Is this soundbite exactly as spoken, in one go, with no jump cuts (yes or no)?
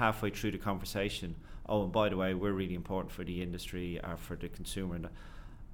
yes